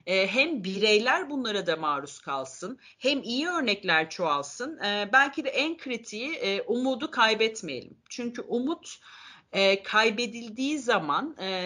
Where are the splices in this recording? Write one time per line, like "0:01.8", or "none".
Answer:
none